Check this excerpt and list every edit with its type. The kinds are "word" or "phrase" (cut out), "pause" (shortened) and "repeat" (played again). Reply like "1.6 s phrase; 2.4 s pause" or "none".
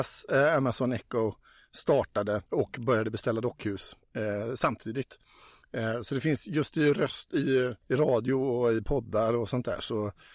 2.5 s pause; 7.8 s pause

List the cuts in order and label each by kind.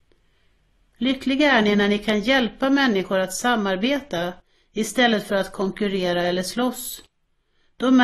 none

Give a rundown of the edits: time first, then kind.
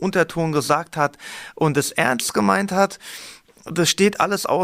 none

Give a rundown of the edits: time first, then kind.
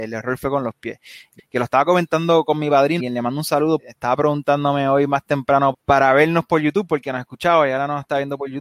1.4 s word; 3.0 s word; 3.8 s word; 5.7 s word

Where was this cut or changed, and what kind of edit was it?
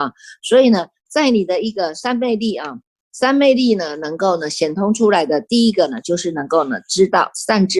none

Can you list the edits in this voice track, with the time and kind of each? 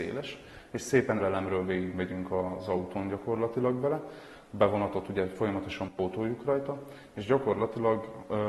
1.2 s word

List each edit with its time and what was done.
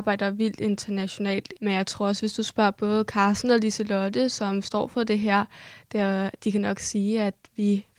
1.6 s word

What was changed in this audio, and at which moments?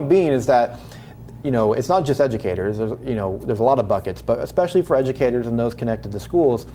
none

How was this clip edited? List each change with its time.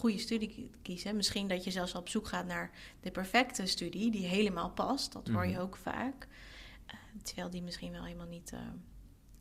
none

